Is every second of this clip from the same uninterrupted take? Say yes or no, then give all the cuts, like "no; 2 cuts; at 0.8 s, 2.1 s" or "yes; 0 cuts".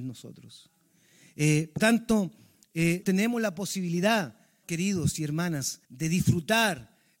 no; 4 cuts; at 1.8 s, 3.0 s, 4.6 s, 5.8 s